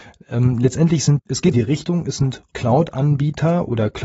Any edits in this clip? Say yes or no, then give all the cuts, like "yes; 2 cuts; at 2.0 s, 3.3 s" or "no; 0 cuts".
yes; 3 cuts; at 1.2 s, 1.5 s, 2.5 s